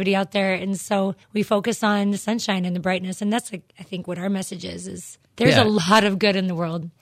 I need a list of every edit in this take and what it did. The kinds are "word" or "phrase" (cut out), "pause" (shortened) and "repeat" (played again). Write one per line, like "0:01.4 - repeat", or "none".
0:01.2 - pause
0:05.2 - pause